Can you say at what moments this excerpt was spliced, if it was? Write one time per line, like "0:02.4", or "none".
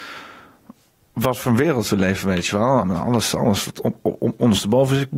none